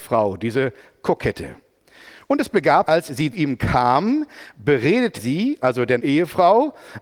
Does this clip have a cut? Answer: yes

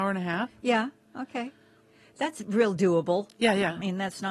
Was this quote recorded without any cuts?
yes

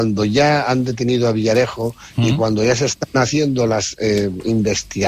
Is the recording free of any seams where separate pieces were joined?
yes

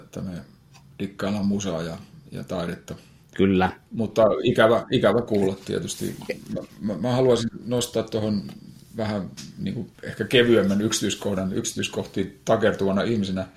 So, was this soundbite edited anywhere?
yes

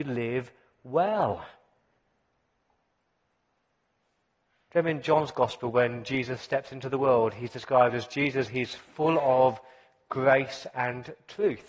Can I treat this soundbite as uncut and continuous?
yes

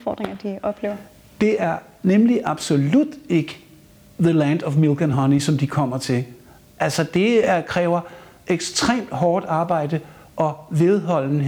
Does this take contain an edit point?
no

